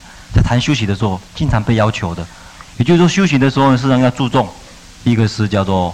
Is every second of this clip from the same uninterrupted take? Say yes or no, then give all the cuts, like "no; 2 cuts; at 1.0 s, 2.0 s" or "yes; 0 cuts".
no; 2 cuts; at 1.3 s, 4.9 s